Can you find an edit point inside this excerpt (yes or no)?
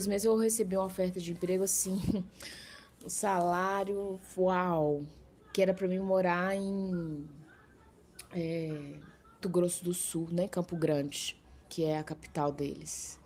yes